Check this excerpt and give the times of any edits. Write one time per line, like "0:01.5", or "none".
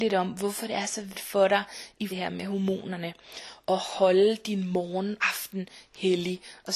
0:01.1
0:02.1
0:05.2